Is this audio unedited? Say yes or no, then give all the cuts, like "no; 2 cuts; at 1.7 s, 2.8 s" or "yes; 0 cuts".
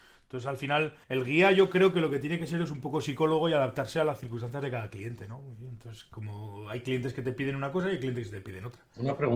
no; 1 cut; at 1.0 s